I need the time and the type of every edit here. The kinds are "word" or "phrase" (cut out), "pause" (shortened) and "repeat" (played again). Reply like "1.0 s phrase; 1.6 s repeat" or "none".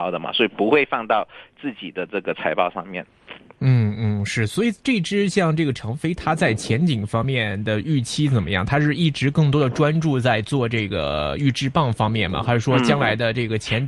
none